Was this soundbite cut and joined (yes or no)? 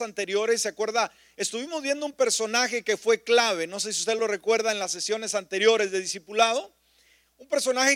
no